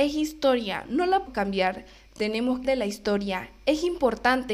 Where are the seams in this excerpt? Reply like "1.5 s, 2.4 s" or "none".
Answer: 1.3 s, 2.6 s